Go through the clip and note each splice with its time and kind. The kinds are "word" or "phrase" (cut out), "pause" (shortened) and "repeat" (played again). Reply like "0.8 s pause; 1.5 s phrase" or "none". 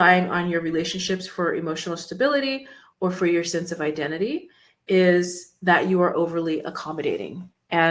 none

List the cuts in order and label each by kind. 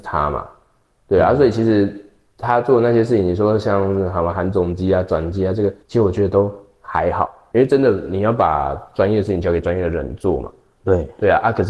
5.8 s pause; 7.5 s word

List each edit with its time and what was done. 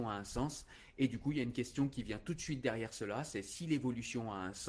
none

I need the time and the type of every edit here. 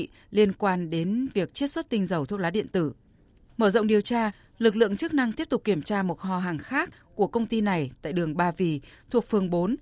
none

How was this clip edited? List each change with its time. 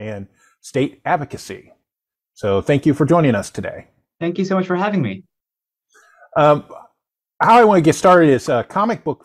none

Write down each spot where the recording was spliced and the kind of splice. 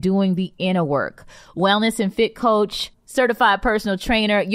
none

